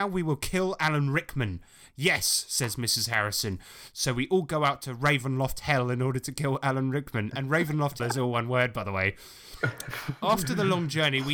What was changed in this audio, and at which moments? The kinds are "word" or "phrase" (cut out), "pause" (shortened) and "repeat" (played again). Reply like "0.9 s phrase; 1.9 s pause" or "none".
8.0 s word